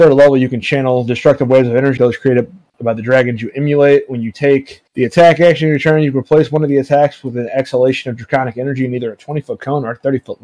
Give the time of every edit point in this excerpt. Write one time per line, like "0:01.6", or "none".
0:02.0
0:04.9